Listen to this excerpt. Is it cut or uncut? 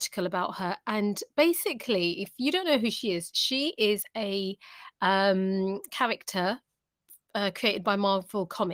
uncut